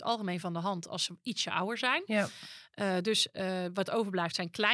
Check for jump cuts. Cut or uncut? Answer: uncut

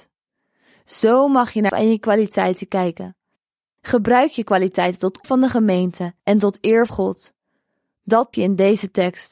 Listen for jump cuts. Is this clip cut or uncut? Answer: cut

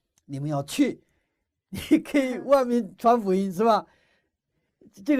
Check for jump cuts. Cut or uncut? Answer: uncut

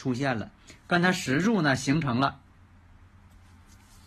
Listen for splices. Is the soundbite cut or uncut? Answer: uncut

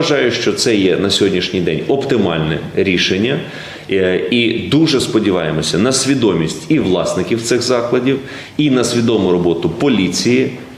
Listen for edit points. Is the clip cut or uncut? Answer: uncut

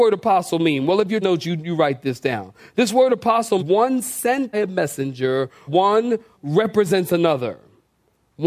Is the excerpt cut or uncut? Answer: cut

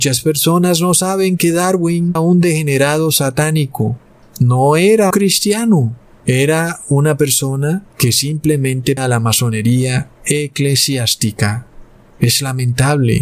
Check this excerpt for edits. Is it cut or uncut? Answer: cut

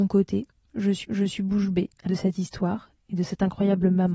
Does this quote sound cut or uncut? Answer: cut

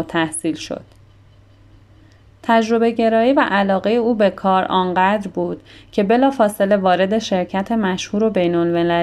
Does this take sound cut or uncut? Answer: uncut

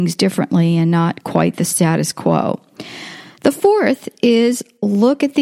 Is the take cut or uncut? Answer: uncut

